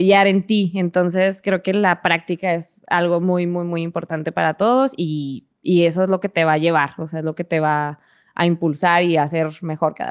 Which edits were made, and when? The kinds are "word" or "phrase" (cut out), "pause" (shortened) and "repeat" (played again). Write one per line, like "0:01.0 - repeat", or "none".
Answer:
none